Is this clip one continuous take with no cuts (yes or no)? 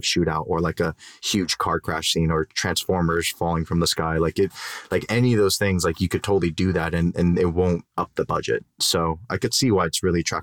yes